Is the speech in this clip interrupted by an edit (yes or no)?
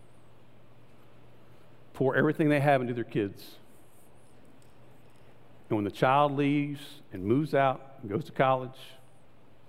no